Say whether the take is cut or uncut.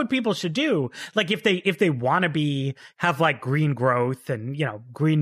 uncut